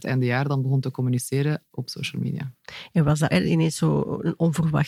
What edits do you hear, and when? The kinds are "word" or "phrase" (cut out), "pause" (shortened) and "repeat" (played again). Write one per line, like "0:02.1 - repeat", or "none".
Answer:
0:01.7 - word
0:03.3 - word